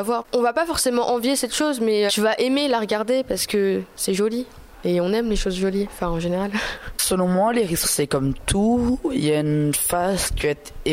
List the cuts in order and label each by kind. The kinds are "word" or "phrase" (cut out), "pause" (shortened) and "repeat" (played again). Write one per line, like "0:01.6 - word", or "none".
0:02.1 - word
0:07.8 - word

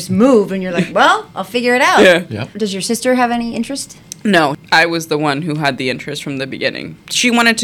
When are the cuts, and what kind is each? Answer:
0:02.5 - pause

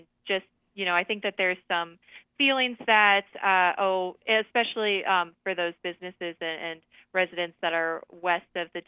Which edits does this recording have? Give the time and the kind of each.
none

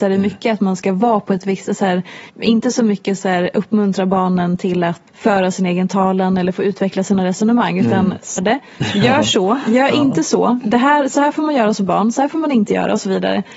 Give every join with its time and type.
0:02.3 - pause
0:05.1 - word
0:08.4 - word

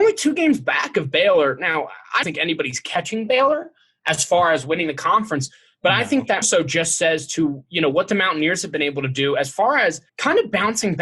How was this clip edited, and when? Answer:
0:02.2 - word
0:06.4 - word
0:10.1 - pause

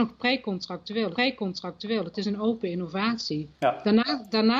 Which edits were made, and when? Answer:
0:01.1 - repeat
0:03.5 - pause

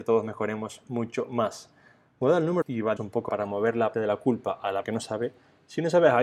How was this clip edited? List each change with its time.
0:02.6 - word
0:03.0 - word
0:03.3 - word
0:03.9 - word
0:04.8 - word

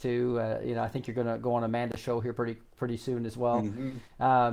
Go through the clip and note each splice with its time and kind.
none

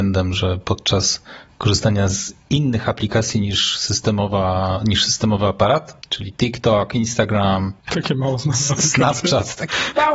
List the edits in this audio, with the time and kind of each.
0:06.0 - pause

